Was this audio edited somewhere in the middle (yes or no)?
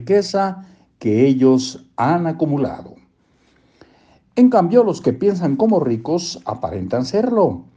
no